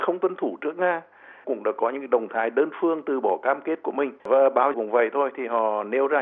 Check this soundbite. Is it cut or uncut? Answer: cut